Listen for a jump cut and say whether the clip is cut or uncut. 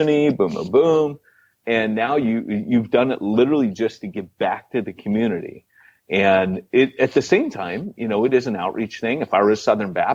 uncut